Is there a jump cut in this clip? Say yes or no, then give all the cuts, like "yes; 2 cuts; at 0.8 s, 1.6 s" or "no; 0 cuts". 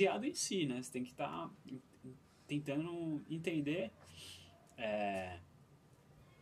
no; 0 cuts